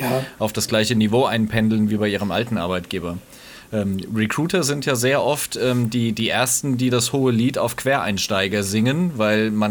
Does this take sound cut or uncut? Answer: uncut